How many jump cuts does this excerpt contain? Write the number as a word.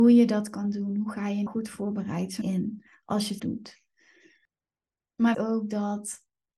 four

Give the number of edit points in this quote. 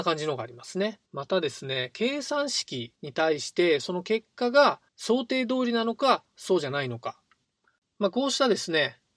four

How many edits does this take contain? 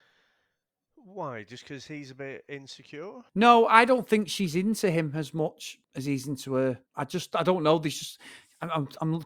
three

